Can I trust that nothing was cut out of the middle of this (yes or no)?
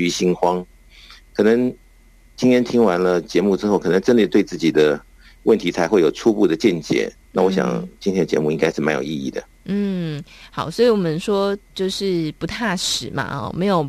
no